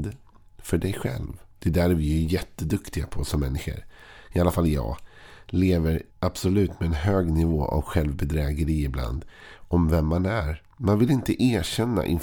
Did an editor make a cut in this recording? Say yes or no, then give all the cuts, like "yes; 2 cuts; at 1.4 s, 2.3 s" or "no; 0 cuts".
yes; 2 cuts; at 1.5 s, 6.1 s